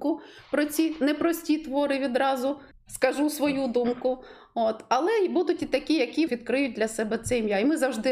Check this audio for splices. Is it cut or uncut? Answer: cut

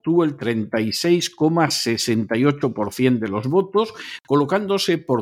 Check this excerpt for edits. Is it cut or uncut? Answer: uncut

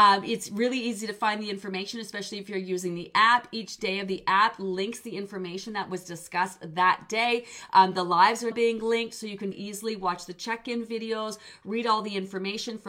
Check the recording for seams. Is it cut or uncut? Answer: cut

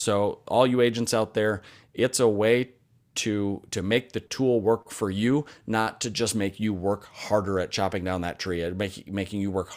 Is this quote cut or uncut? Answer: uncut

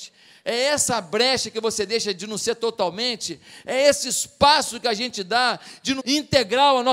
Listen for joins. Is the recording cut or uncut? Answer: cut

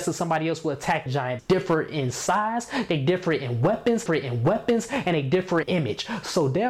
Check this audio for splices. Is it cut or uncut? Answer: cut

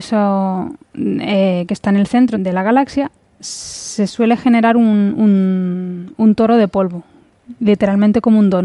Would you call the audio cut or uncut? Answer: cut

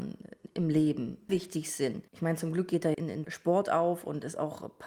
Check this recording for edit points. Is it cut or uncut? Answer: cut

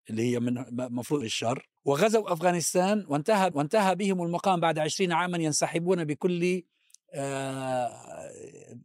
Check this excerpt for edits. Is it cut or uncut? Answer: cut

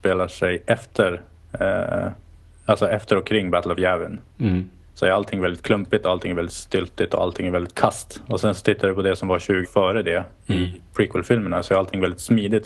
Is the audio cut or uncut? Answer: cut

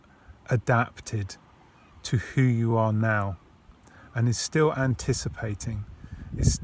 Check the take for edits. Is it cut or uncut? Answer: uncut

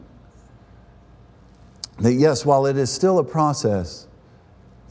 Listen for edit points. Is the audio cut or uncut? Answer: uncut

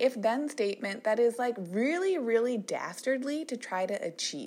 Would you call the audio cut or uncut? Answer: uncut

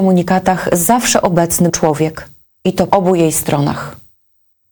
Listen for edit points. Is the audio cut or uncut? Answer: cut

